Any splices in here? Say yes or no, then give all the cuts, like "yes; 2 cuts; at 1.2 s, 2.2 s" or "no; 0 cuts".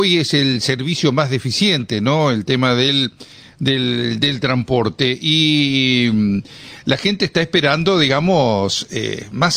no; 0 cuts